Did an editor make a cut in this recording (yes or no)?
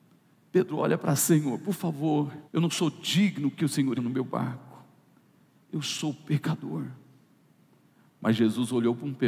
yes